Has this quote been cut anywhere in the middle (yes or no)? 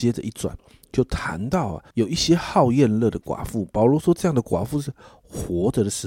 yes